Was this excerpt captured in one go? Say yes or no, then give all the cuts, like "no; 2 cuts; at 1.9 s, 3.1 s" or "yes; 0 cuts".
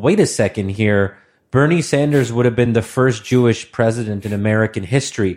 yes; 0 cuts